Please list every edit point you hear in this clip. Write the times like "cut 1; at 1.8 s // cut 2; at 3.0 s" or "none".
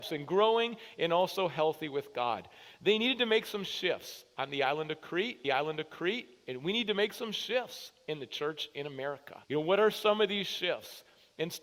cut 1; at 5.4 s // cut 2; at 9.4 s